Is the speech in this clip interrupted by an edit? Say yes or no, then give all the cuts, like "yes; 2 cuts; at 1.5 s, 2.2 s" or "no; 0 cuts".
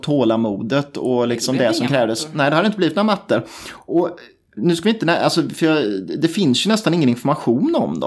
no; 0 cuts